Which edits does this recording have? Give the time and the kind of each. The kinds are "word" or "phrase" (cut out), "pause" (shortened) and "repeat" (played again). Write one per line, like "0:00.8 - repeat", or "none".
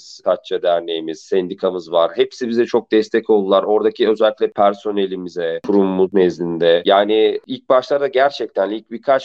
none